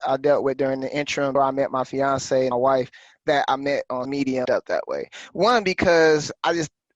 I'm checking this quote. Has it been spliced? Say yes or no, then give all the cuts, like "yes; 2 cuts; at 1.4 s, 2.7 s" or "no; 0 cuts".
yes; 4 cuts; at 1.3 s, 2.5 s, 4.0 s, 4.4 s